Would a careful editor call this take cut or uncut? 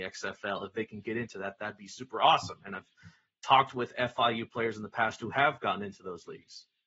uncut